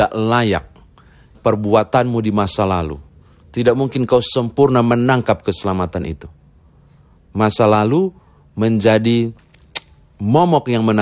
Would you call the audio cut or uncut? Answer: cut